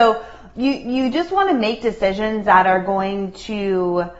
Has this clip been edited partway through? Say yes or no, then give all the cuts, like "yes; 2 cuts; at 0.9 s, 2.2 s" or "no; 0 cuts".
no; 0 cuts